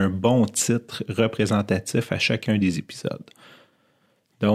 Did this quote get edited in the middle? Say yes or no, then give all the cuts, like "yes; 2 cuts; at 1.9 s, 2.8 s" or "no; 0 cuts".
no; 0 cuts